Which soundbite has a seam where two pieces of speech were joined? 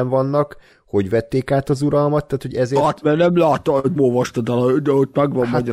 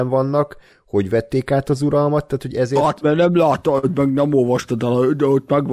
first; 1 cut; at 4.0 s

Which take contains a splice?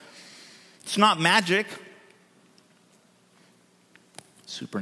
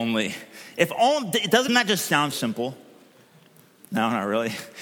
second; 2 cuts; at 1.7 s, 2.3 s

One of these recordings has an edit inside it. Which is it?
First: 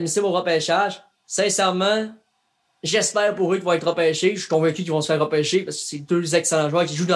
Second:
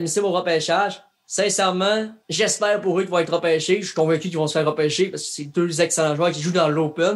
second; 1 cut; at 2.2 s

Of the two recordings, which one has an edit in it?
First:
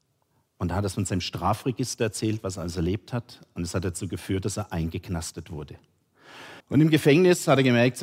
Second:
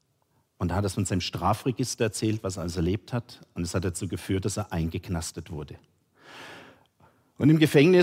first; 1 cut; at 6.6 s

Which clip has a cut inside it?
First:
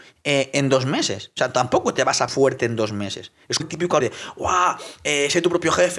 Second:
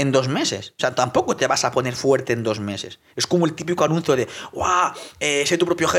first; 3 cuts; at 2.3 s, 3.6 s, 4.0 s

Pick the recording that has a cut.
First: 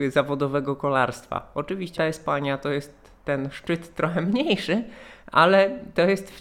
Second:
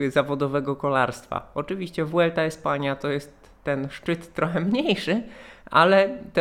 first; 1 cut; at 2.0 s

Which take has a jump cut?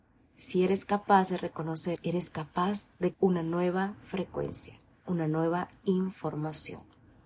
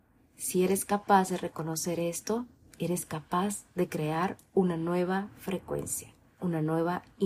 first; 2 cuts; at 2.0 s, 3.1 s

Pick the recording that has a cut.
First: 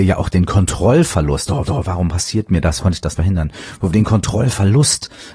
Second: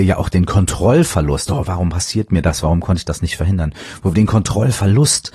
first; 3 cuts; at 1.7 s, 2.8 s, 3.2 s

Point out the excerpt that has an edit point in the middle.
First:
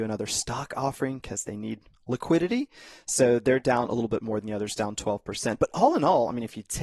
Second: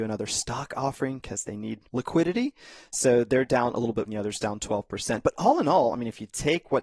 second; 2 cuts; at 1.9 s, 4.0 s

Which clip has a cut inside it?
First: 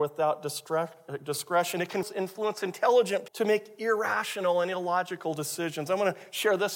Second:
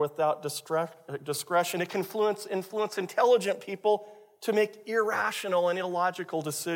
first; 2 cuts; at 2.0 s, 3.3 s

